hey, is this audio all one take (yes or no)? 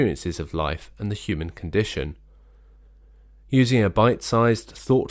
yes